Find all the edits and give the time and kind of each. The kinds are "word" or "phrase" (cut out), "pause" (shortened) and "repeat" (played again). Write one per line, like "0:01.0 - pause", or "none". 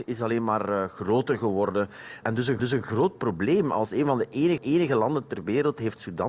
0:02.6 - repeat
0:04.6 - repeat